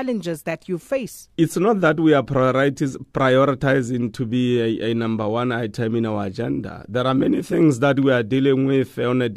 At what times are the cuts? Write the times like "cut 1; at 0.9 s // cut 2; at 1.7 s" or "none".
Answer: cut 1; at 1.3 s